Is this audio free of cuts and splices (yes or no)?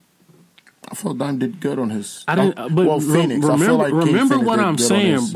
yes